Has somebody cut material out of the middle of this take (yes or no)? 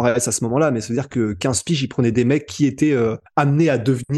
yes